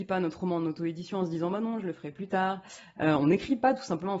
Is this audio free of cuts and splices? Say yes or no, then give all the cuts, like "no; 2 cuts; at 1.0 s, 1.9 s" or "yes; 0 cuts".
yes; 0 cuts